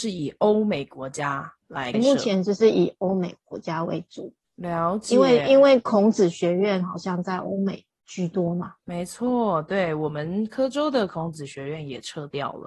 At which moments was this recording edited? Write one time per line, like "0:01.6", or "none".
0:01.6
0:01.9
0:08.8

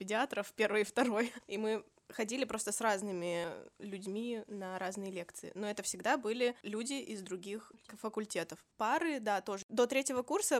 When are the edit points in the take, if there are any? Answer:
none

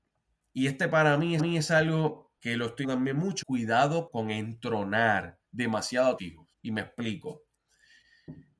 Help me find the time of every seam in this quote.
0:01.4
0:02.4
0:02.8
0:03.4
0:04.1
0:05.4
0:06.2
0:06.5

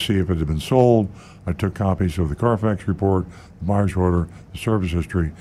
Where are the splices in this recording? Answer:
0:01.7

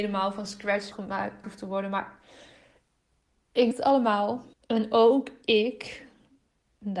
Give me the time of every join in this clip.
0:00.9
0:01.4
0:03.7
0:04.5

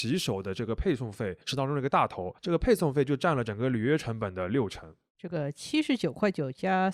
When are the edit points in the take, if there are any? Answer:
0:01.4
0:02.4

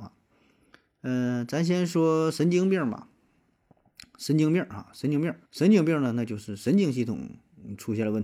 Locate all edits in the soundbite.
0:05.4

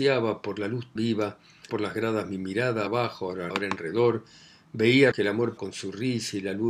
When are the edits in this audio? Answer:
0:01.0
0:01.7
0:02.9
0:03.5
0:05.1
0:05.6

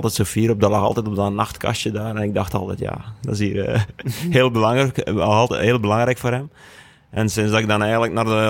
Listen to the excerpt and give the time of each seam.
none

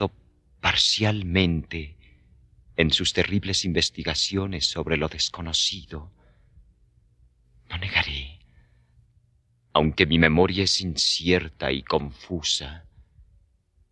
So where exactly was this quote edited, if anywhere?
none

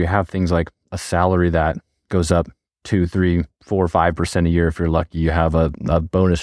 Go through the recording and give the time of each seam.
none

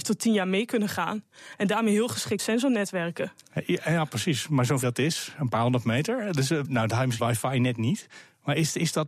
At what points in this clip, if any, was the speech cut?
0:02.4
0:04.8
0:06.6
0:07.2

